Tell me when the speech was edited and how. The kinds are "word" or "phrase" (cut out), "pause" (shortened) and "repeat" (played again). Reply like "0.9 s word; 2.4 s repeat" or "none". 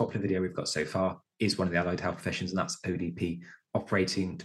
none